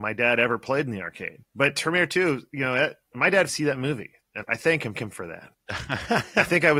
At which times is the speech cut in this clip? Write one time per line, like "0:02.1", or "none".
0:03.5
0:04.4
0:04.9